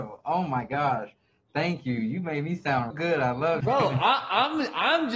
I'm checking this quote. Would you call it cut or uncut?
cut